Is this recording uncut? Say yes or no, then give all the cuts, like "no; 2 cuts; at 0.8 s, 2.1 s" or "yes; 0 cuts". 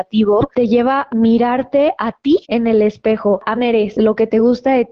no; 3 cuts; at 1.1 s, 2.4 s, 3.6 s